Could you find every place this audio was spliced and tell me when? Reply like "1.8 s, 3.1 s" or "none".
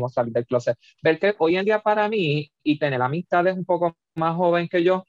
none